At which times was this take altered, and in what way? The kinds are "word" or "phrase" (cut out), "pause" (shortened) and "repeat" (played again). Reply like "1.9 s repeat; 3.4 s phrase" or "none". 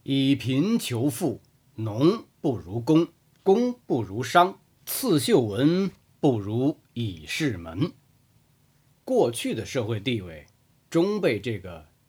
none